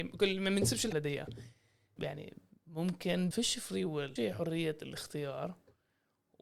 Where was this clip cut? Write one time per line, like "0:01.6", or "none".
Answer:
0:00.9
0:02.0
0:03.3
0:04.2